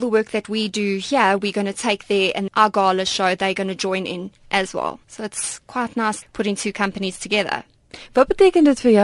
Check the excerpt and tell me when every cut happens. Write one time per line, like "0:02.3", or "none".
0:02.5
0:05.0
0:06.2